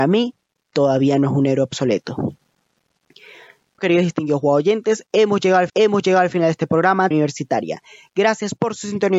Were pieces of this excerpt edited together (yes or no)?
yes